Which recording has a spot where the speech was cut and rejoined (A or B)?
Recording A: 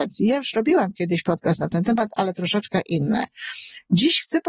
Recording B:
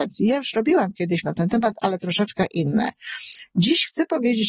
B